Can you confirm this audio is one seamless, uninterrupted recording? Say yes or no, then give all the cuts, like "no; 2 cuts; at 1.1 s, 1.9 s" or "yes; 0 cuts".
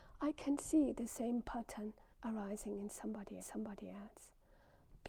no; 2 cuts; at 2.1 s, 3.4 s